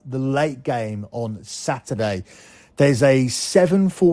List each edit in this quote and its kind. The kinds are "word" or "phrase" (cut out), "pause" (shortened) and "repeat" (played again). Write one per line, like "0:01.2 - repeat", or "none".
none